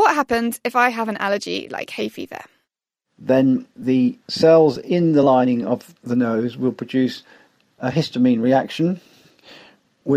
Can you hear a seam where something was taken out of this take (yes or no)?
no